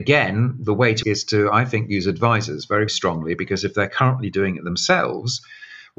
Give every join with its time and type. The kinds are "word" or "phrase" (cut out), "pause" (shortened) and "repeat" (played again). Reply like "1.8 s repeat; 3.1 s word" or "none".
1.0 s phrase; 2.9 s word